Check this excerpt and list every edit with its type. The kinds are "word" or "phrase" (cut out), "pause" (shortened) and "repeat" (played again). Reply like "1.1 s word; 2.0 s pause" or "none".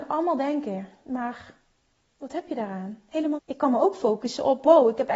3.4 s word